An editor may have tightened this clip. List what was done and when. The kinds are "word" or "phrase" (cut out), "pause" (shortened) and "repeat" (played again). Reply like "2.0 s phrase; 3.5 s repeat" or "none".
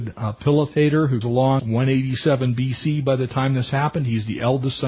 1.2 s word; 1.6 s phrase

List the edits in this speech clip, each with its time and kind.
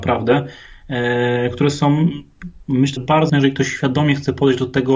3.0 s word; 3.3 s word

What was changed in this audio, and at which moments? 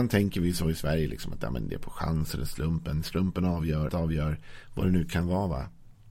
3.9 s word

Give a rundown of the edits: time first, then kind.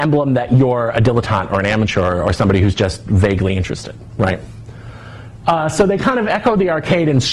none

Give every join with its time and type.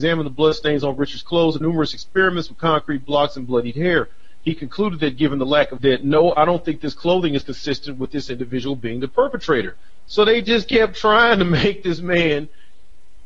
1.6 s word; 5.8 s phrase

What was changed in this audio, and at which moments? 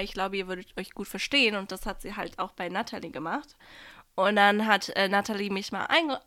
none

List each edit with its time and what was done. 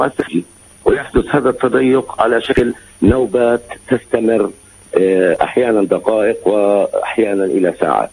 none

